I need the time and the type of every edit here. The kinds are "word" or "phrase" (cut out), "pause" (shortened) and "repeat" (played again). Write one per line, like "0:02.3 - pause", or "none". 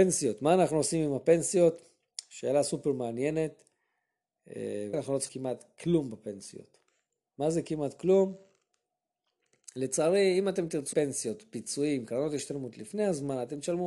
0:04.9 - word
0:05.3 - word
0:10.9 - word